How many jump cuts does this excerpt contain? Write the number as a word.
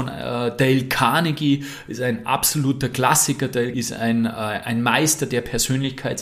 one